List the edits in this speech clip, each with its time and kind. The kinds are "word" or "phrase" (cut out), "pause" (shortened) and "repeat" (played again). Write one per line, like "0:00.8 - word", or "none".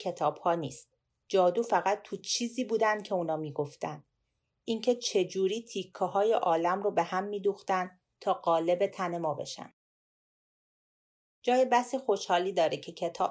none